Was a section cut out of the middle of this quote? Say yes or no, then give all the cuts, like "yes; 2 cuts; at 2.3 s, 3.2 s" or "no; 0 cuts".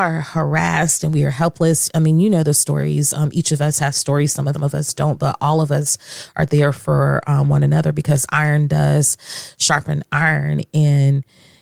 yes; 1 cut; at 4.5 s